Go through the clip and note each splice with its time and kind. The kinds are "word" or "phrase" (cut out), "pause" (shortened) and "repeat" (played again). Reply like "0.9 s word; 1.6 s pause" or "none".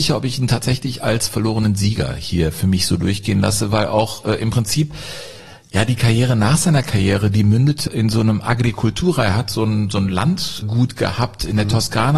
none